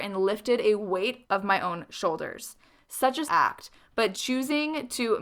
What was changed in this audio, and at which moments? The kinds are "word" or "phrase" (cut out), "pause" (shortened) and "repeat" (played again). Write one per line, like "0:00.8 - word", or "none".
0:01.2 - word
0:03.3 - word
0:04.1 - word